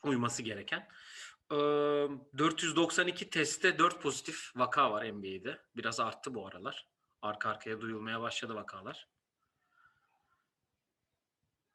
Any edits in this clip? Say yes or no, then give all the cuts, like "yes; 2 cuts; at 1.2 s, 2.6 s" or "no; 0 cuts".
no; 0 cuts